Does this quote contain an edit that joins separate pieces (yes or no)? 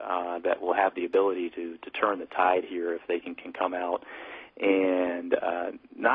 no